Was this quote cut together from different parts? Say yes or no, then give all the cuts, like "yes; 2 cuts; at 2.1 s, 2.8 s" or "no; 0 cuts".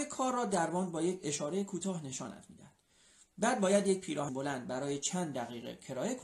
yes; 1 cut; at 4.3 s